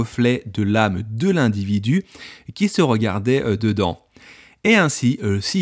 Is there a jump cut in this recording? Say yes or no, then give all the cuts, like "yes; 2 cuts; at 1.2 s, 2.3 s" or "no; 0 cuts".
no; 0 cuts